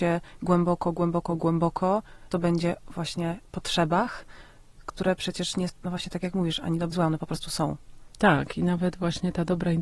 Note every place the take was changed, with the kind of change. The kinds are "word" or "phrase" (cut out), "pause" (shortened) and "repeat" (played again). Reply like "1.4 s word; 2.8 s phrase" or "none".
2.3 s word; 2.8 s word; 5.7 s word; 6.9 s word